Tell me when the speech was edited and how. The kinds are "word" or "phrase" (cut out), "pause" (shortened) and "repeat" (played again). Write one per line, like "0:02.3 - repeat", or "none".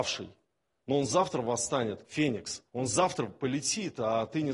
0:02.0 - word
0:02.7 - pause